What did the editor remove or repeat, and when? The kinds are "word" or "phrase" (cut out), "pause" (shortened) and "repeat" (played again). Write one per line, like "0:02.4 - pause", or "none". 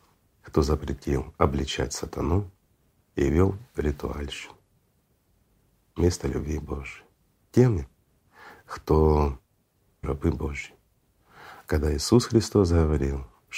0:10.0 - phrase